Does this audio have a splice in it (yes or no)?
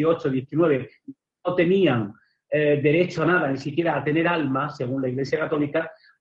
no